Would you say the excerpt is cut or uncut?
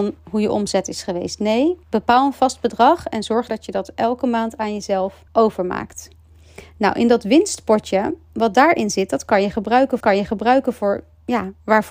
cut